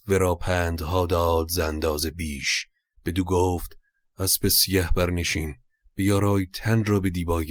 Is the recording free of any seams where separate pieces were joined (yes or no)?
yes